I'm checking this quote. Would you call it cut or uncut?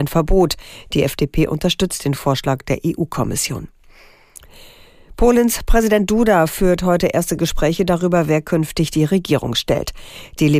uncut